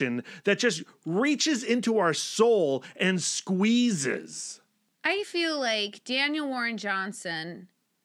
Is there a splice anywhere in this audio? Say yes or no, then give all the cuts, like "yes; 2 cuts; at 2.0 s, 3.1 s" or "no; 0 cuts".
no; 0 cuts